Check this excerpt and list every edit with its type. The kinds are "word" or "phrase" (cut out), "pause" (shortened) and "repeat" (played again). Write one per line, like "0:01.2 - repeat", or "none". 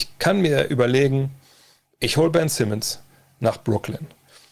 none